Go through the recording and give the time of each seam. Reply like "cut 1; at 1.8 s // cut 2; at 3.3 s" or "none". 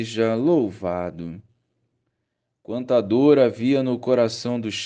none